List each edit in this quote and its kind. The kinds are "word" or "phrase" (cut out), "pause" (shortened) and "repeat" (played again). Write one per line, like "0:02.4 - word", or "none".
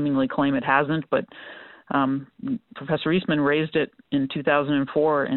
0:04.0 - pause